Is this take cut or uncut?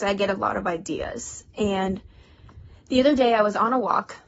uncut